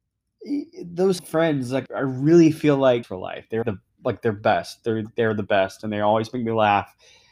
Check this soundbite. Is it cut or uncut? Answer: cut